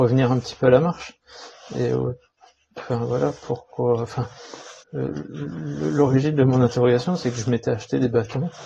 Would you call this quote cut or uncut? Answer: cut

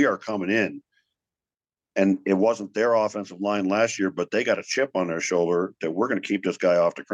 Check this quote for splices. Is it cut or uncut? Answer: uncut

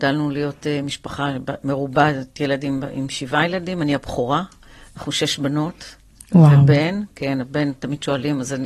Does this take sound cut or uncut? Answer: uncut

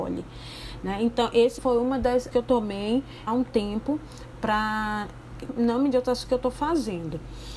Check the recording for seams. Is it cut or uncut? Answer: cut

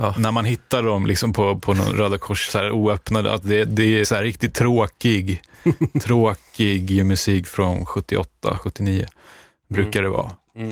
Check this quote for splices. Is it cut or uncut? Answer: uncut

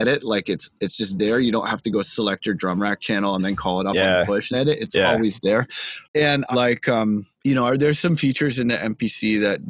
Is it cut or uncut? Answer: cut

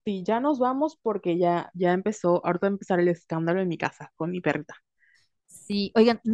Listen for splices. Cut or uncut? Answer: uncut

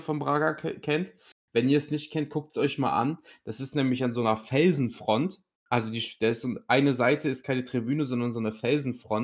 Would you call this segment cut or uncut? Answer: uncut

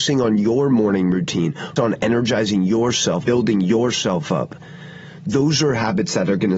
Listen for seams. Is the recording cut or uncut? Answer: cut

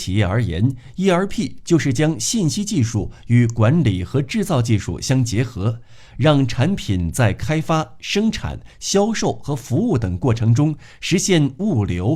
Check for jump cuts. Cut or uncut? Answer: uncut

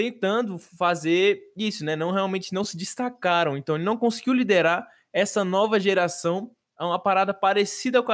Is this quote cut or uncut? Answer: uncut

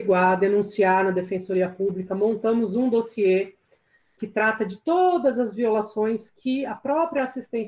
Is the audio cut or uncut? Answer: uncut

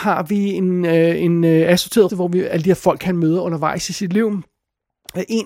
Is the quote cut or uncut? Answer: cut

